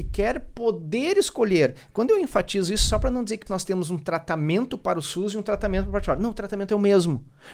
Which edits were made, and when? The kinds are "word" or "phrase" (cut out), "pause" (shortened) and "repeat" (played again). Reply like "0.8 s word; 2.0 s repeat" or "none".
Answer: 3.5 s word